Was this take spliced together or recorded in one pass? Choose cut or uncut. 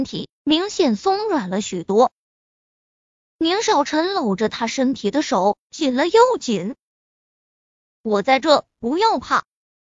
uncut